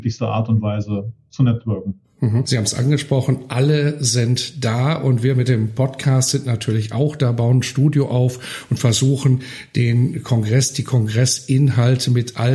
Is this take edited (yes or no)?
no